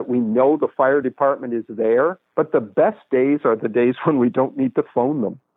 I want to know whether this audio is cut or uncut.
uncut